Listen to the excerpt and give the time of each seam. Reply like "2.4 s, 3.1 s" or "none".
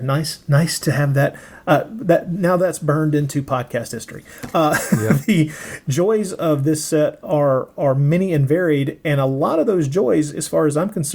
none

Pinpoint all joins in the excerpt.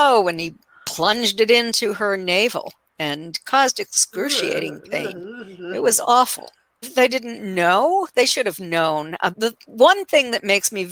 6.8 s, 9.3 s

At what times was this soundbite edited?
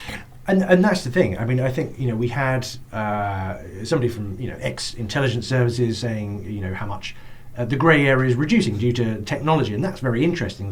none

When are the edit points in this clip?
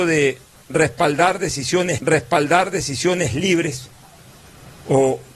2.0 s

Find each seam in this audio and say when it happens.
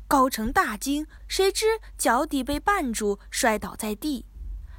1.2 s

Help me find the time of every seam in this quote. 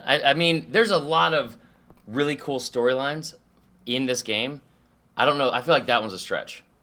none

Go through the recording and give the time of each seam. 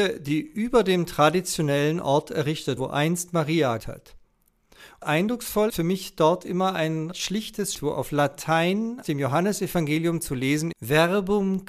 2.8 s, 3.8 s, 5.0 s, 5.7 s, 7.1 s, 7.7 s, 9.0 s, 10.7 s

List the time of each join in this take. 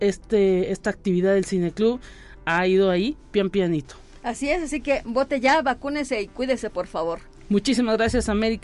none

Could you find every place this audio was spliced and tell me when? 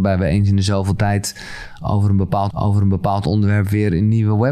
2.5 s

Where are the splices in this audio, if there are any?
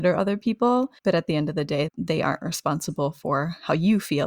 1.0 s, 1.9 s

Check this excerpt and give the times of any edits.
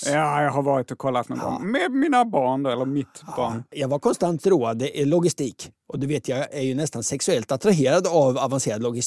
none

